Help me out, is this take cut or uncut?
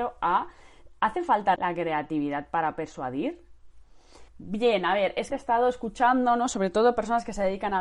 cut